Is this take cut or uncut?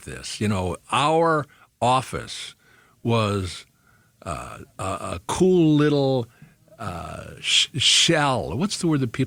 uncut